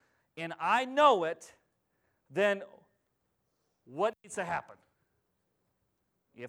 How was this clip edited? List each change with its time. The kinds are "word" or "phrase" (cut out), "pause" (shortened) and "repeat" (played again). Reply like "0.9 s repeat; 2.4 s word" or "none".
none